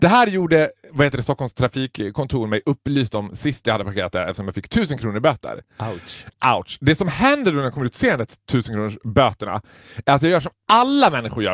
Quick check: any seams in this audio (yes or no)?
no